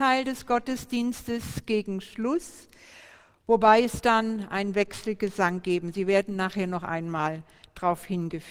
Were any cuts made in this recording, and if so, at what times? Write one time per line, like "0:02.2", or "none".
0:04.0